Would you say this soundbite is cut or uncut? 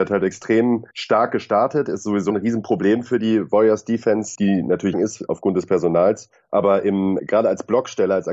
cut